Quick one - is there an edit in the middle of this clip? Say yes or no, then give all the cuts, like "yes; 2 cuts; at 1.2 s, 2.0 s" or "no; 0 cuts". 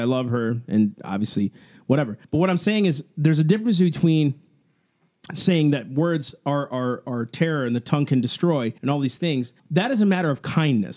yes; 4 cuts; at 2.2 s, 7.0 s, 8.8 s, 9.6 s